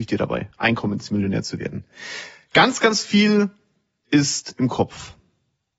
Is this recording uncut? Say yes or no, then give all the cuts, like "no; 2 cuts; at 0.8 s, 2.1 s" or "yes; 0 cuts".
yes; 0 cuts